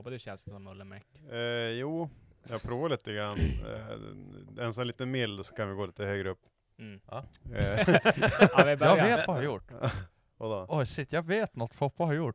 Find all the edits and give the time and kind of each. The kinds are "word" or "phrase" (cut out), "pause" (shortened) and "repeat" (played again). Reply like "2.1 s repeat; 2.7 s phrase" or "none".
9.3 s phrase

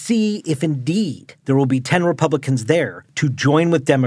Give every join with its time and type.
none

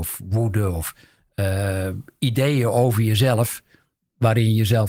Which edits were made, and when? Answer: none

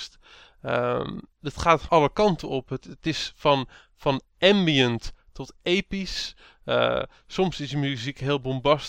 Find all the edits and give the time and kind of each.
1.3 s pause; 1.9 s word

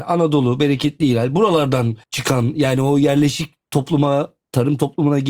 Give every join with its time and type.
2.0 s pause

